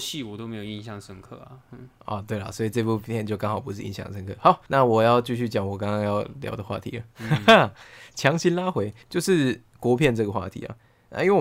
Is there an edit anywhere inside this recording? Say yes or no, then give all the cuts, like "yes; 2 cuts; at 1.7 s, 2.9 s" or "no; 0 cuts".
yes; 4 cuts; at 2.0 s, 4.7 s, 7.1 s, 9.0 s